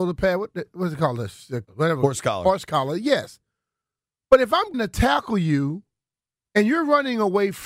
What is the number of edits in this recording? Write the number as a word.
two